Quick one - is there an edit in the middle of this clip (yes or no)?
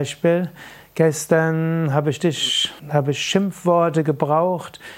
yes